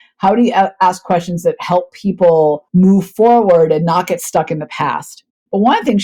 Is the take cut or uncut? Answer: cut